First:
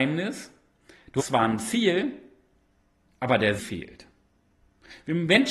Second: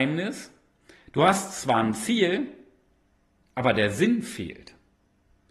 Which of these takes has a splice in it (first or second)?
first